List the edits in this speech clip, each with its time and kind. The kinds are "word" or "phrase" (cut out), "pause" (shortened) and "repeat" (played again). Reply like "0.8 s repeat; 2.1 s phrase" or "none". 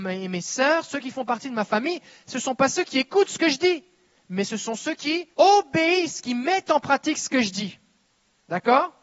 5.3 s pause

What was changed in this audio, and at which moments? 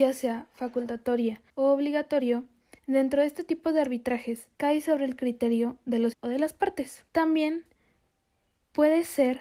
1.5 s pause; 2.8 s pause; 4.5 s pause; 6.1 s word; 7.1 s pause

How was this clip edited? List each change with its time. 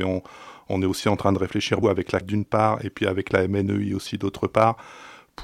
1.8 s word; 2.2 s word

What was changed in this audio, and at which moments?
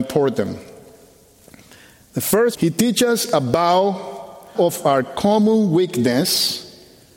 2.5 s word; 4.5 s word

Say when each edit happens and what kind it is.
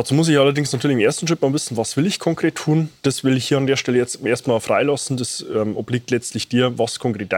3.0 s pause

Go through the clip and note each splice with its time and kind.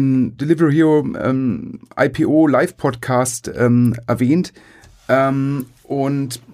none

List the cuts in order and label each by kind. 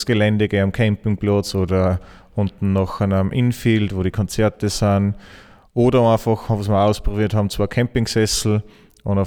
none

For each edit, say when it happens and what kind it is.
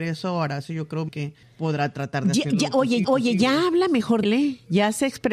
1.1 s word; 3.0 s repeat; 4.2 s word

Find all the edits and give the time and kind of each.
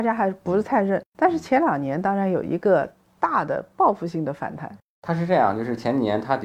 none

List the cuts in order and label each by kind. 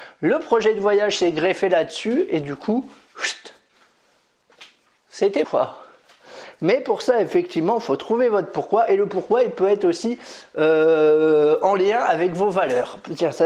5.4 s word

